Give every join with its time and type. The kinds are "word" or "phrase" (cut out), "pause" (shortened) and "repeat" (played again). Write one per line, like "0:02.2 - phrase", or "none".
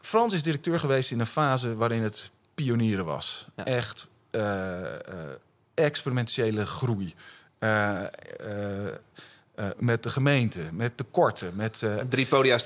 0:09.7 - word